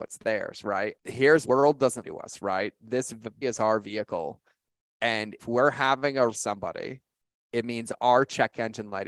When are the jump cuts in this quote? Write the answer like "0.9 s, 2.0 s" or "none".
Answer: 1.0 s, 1.4 s, 2.0 s, 3.4 s, 5.4 s, 6.3 s